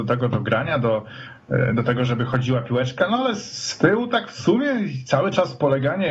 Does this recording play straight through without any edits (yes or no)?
yes